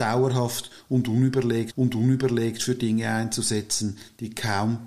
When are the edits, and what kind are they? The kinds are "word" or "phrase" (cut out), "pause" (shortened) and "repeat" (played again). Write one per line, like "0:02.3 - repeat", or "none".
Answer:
0:01.7 - repeat